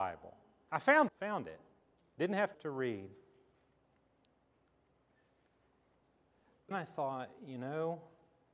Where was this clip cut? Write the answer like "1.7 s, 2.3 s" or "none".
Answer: 1.1 s, 2.5 s, 6.7 s